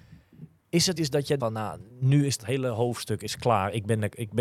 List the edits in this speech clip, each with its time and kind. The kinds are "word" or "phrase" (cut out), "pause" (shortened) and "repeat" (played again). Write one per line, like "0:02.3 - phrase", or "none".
0:01.0 - word
0:01.4 - word
0:01.9 - pause
0:02.4 - phrase